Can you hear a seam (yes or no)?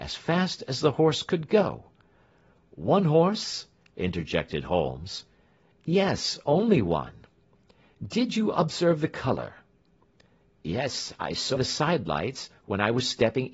yes